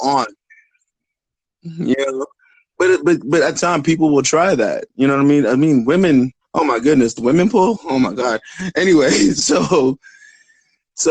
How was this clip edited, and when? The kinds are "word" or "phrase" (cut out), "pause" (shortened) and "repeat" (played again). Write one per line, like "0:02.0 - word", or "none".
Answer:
0:02.4 - pause
0:03.6 - phrase
0:06.4 - pause
0:07.2 - word